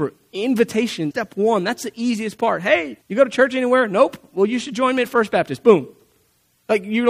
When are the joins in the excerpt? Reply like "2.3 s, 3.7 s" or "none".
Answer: 1.1 s, 3.0 s